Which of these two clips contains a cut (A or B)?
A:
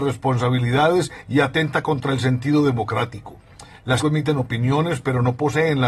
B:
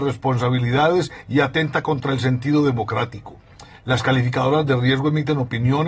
A